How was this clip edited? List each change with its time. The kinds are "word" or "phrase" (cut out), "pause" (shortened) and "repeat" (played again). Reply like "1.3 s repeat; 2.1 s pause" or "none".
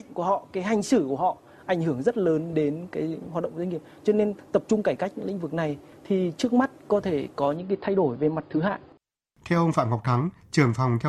none